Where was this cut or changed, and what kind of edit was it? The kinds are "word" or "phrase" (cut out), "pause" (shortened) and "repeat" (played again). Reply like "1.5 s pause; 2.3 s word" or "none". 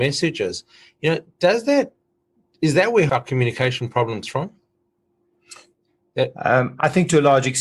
3.1 s word; 4.2 s word